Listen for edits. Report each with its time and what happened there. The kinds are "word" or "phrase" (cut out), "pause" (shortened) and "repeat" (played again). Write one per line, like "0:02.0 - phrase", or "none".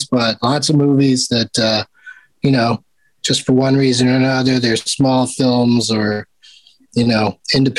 none

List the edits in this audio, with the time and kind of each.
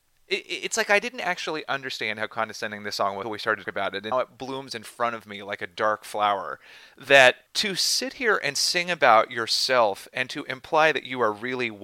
0:03.2 - word
0:03.6 - phrase
0:04.1 - word
0:07.5 - pause

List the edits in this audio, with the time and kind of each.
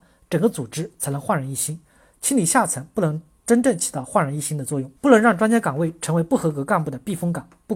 0:05.0 - pause

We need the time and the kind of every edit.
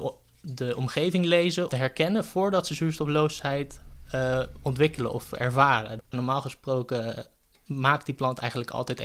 0:01.7 - phrase

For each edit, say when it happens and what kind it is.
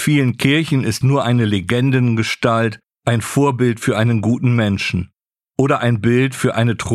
0:01.0 - word

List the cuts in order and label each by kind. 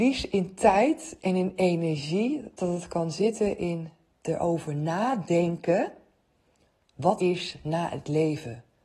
0:07.2 - word

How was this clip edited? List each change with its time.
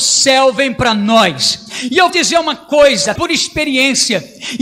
0:02.1 - word
0:03.2 - word

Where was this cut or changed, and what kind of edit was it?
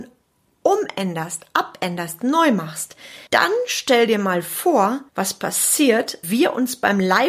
0:03.3 - pause
0:05.1 - pause
0:06.2 - word

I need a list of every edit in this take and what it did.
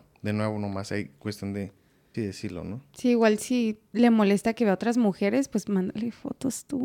0:02.1 - word

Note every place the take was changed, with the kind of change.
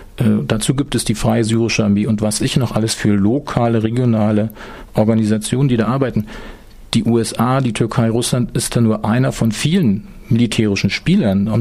0:02.4 - word

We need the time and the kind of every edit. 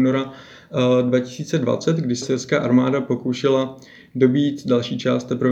0:02.2 - word

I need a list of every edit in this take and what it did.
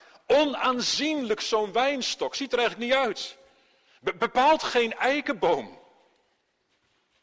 none

